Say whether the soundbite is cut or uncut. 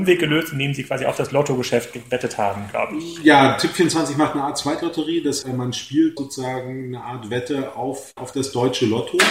cut